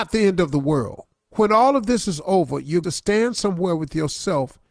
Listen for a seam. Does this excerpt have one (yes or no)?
yes